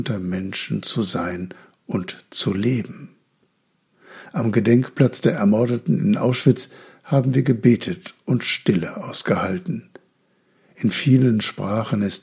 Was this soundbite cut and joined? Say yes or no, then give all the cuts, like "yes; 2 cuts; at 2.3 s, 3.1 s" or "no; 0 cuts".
no; 0 cuts